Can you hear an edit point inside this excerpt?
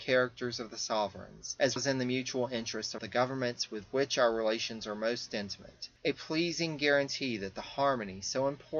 yes; 2 cuts; at 1.8 s, 3.0 s

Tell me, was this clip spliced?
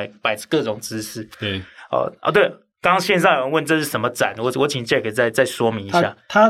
no; 0 cuts

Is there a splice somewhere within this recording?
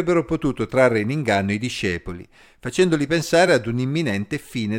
no; 0 cuts

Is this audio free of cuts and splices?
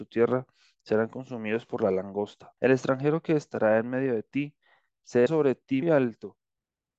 no; 3 cuts; at 2.6 s, 5.3 s, 5.8 s

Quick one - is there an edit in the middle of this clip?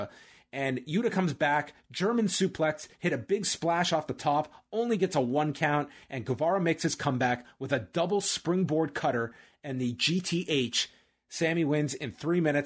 no; 0 cuts

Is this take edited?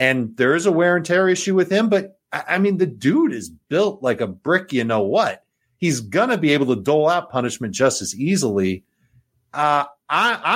no; 0 cuts

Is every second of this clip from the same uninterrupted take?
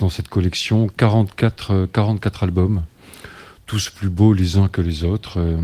yes; 0 cuts

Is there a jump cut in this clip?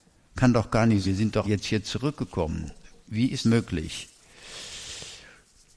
yes; 3 cuts; at 1.0 s, 1.4 s, 3.4 s

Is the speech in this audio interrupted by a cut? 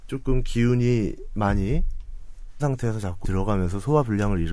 yes; 2 cuts; at 2.6 s, 3.2 s

